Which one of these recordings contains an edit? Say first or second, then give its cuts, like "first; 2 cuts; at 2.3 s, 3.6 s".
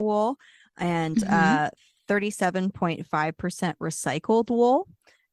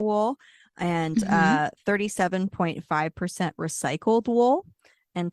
second; 1 cut; at 1.8 s